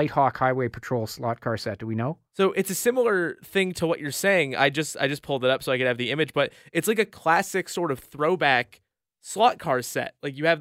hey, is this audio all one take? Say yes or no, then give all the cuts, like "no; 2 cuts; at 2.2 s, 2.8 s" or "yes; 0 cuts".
yes; 0 cuts